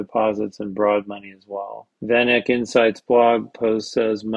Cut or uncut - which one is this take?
cut